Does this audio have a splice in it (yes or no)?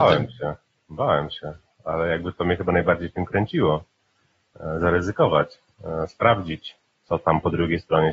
no